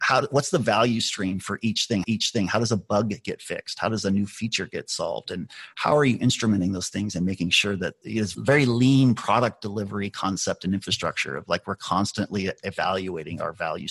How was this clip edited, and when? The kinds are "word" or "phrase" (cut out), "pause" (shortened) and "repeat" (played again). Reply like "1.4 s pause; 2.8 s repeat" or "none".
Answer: 2.0 s repeat; 8.0 s word